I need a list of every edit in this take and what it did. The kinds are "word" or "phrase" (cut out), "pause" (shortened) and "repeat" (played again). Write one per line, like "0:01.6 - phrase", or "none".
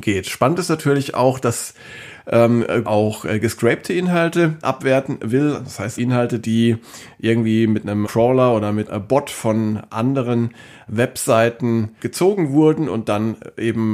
0:02.8 - word
0:04.6 - word
0:06.0 - word
0:08.0 - word
0:08.9 - word
0:12.0 - word